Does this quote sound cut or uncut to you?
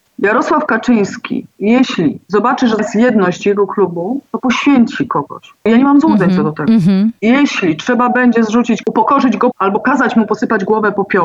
cut